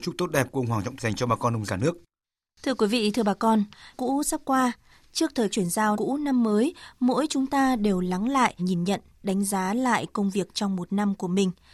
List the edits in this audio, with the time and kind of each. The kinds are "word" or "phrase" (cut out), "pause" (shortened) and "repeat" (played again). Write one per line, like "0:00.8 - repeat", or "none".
0:01.0 - word
0:01.7 - word
0:03.9 - word
0:05.5 - word
0:05.9 - word
0:08.6 - word